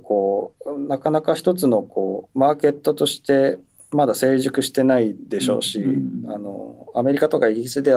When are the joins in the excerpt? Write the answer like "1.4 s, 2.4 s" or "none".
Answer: none